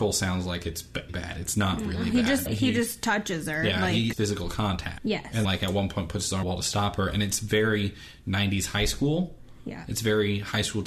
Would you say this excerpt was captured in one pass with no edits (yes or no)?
no